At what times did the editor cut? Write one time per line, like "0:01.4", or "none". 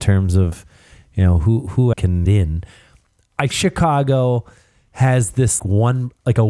0:01.9
0:02.2
0:03.5
0:05.6